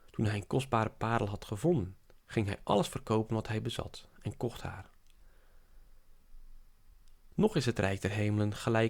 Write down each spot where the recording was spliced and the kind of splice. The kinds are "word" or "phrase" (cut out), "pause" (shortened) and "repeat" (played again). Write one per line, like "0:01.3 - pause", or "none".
none